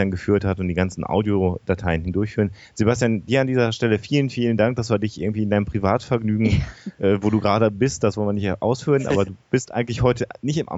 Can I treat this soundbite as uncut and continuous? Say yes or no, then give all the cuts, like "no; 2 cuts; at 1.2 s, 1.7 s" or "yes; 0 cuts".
yes; 0 cuts